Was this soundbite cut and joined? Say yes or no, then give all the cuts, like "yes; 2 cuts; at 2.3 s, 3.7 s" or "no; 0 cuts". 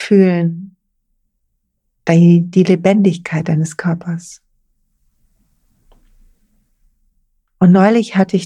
no; 0 cuts